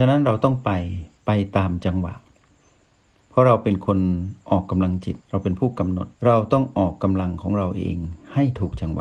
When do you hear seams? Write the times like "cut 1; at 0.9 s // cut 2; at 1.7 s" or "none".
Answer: cut 1; at 5.2 s // cut 2; at 6.1 s

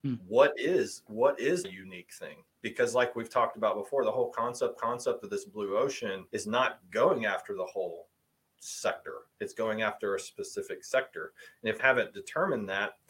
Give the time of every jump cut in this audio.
cut 1; at 1.1 s // cut 2; at 1.6 s // cut 3; at 2.5 s // cut 4; at 4.8 s // cut 5; at 6.3 s // cut 6; at 11.8 s

